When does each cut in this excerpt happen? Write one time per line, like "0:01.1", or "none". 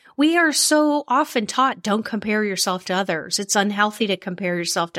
none